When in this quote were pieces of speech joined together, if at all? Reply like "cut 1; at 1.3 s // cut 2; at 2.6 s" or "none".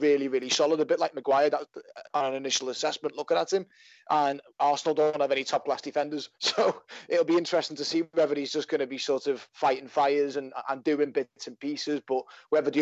cut 1; at 2.0 s // cut 2; at 4.5 s // cut 3; at 6.3 s

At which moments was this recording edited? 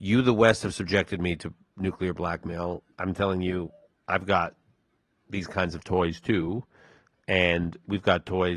none

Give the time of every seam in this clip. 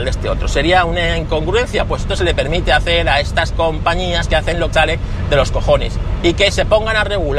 cut 1; at 2.1 s // cut 2; at 4.7 s

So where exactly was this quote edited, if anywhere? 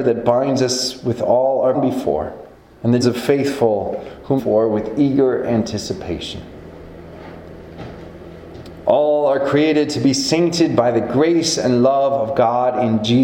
cut 1; at 1.7 s // cut 2; at 2.5 s // cut 3; at 3.0 s // cut 4; at 4.4 s

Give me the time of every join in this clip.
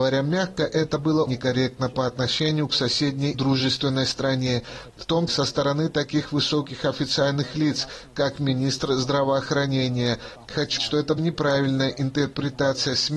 cut 1; at 1.3 s // cut 2; at 3.3 s // cut 3; at 5.3 s // cut 4; at 10.8 s // cut 5; at 11.2 s

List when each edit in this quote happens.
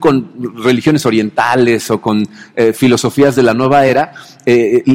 none

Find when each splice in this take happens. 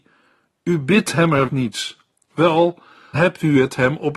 cut 1; at 1.5 s // cut 2; at 3.1 s

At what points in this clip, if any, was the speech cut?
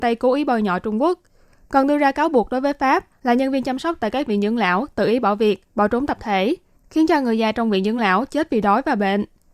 none

